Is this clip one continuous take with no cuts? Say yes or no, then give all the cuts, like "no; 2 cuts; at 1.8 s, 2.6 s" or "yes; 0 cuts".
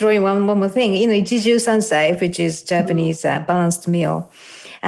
yes; 0 cuts